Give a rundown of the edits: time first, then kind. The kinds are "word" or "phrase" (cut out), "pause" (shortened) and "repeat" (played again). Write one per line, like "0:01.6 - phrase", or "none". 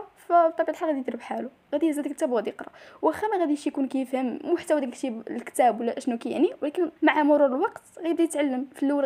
0:07.0 - pause